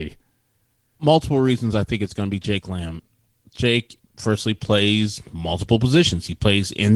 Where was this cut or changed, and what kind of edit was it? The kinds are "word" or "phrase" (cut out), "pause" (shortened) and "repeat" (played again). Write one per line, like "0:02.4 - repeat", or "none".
none